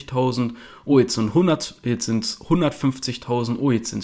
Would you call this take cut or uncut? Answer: uncut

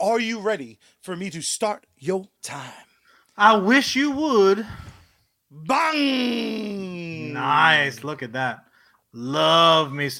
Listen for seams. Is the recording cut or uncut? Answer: uncut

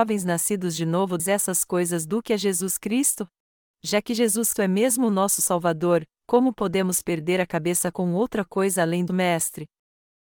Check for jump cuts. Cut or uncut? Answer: cut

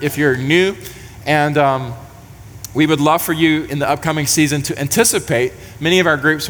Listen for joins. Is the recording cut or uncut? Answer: uncut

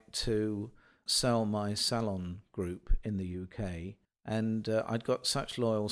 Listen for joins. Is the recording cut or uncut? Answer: cut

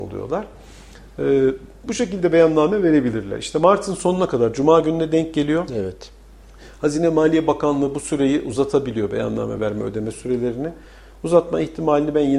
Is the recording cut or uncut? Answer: uncut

